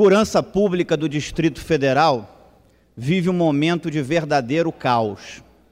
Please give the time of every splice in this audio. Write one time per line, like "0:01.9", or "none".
none